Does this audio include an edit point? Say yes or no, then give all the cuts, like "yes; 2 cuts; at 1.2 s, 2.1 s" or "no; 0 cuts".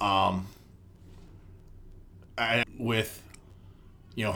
yes; 1 cut; at 2.6 s